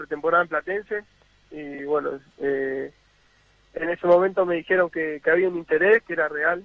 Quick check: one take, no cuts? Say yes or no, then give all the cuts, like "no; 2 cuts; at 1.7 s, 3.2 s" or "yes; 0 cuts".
yes; 0 cuts